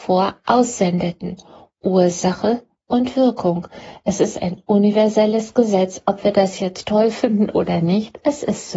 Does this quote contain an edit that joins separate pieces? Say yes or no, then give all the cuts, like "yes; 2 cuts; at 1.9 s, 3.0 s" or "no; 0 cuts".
no; 0 cuts